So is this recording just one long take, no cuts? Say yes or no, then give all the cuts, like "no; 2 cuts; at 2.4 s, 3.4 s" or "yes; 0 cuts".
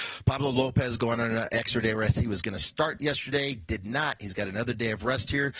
yes; 0 cuts